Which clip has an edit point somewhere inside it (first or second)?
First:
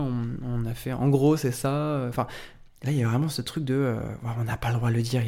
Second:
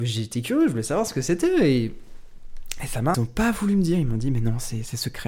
second